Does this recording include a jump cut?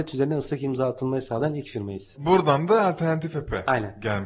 no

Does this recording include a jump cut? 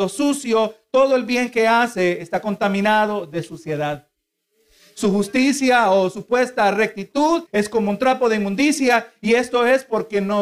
yes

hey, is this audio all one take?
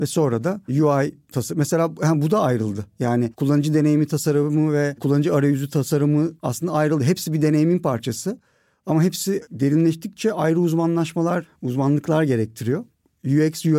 yes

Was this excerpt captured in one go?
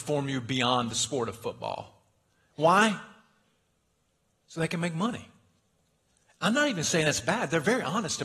yes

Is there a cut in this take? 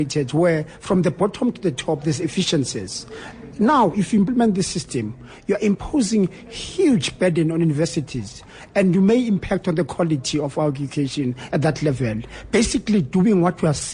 no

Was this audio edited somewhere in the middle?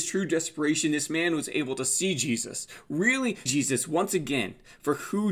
yes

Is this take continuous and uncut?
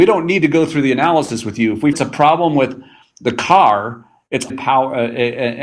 no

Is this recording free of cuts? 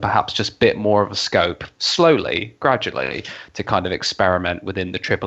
yes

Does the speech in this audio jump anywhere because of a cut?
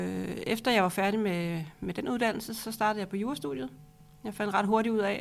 no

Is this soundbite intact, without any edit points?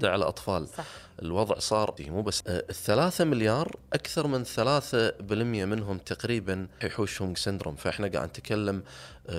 no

